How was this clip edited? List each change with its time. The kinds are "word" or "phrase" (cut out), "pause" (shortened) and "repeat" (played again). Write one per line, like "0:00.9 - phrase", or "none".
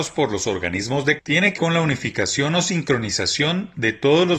0:01.2 - word
0:01.6 - word